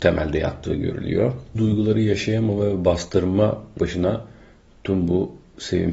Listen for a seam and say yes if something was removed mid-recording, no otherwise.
yes